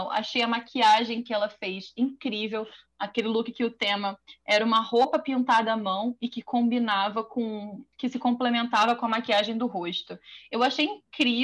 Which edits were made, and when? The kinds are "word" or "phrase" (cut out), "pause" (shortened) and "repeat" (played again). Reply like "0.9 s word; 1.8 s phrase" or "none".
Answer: 7.9 s pause